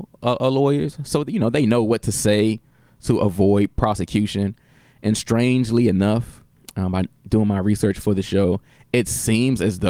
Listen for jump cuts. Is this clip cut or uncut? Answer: uncut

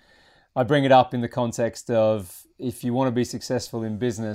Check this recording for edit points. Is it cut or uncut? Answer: uncut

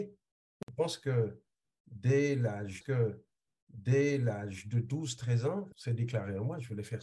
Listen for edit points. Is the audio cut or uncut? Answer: cut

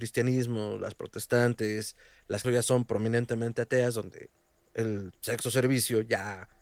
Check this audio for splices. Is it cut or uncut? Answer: cut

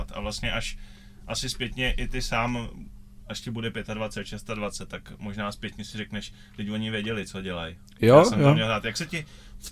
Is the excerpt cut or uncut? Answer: uncut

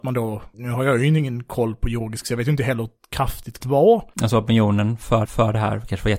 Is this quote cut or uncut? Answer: cut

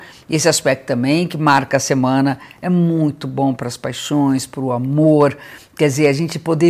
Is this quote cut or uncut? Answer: uncut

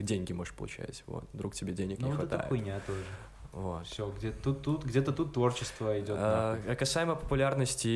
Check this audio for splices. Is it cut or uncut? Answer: uncut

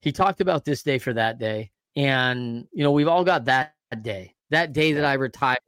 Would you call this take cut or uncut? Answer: cut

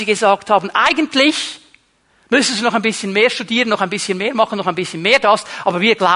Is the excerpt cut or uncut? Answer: uncut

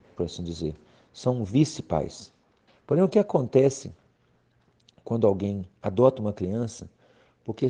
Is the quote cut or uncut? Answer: cut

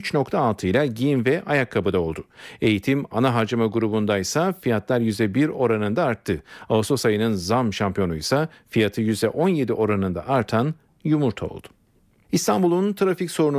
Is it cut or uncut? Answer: uncut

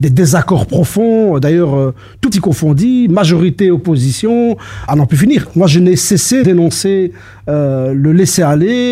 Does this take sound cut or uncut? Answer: cut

